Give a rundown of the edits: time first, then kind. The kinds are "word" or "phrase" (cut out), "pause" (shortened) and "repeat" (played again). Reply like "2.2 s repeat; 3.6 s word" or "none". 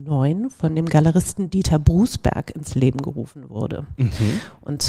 none